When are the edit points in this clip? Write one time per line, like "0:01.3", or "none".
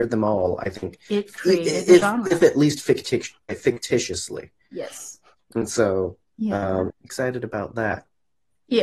0:05.3
0:06.3
0:06.9